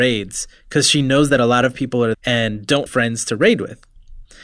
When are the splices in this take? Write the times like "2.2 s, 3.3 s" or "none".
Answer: 2.1 s, 2.9 s